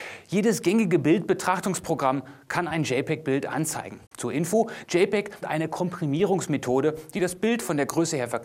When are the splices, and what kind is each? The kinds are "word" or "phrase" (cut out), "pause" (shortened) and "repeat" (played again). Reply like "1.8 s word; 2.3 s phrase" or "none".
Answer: 4.1 s pause; 5.4 s word